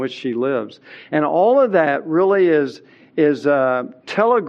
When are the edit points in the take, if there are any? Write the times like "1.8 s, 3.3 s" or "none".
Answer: none